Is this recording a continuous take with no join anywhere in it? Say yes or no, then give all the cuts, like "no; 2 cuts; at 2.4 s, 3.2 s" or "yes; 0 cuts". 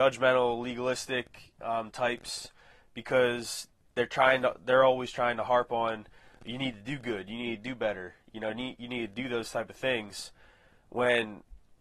yes; 0 cuts